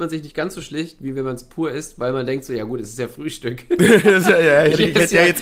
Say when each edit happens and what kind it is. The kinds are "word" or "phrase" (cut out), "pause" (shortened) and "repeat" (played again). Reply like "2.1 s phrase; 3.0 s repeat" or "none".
none

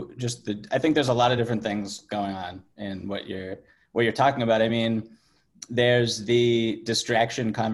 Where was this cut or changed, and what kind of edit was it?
none

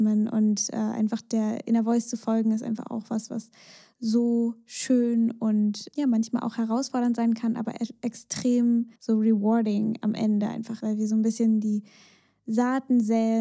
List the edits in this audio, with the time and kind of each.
9.0 s pause; 10.8 s word

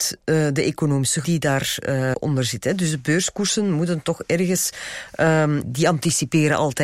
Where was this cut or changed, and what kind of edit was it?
1.2 s word; 2.1 s word; 5.6 s word

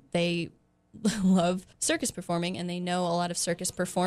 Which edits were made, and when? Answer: 1.7 s pause

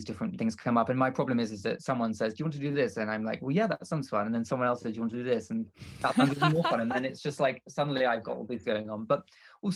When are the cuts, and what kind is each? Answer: 8.6 s word

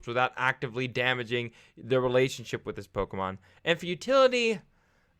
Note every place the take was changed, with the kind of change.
none

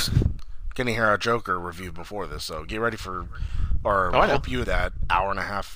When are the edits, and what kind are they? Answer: 4.6 s word

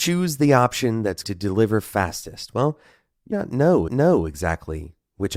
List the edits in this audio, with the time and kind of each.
1.2 s word; 3.3 s word; 3.9 s repeat

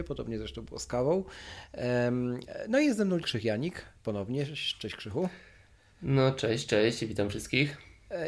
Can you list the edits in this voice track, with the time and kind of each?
3.2 s word

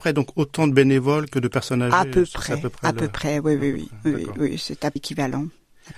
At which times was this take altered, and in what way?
5.0 s word

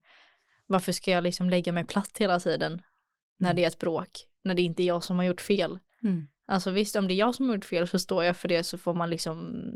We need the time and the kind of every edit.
none

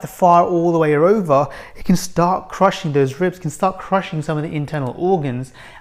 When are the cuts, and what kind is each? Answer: none

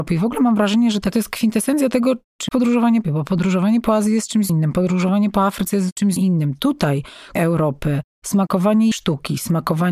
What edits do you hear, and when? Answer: 1.1 s word; 2.5 s word; 3.0 s word; 4.5 s word; 6.2 s word; 7.4 s word; 8.9 s word

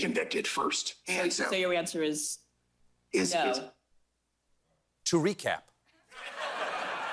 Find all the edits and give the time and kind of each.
none

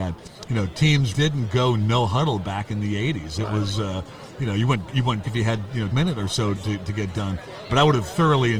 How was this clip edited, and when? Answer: 1.1 s word; 5.2 s word; 5.9 s word; 6.6 s word; 7.7 s word

